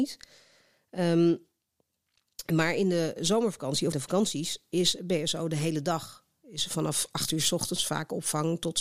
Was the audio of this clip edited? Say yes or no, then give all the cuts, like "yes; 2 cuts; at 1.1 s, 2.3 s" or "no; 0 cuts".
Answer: yes; 1 cut; at 3.9 s